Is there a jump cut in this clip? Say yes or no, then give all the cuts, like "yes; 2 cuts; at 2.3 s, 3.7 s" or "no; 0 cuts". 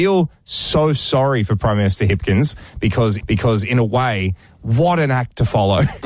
yes; 1 cut; at 3.2 s